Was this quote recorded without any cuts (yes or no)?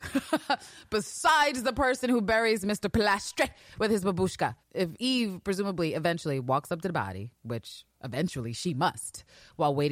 yes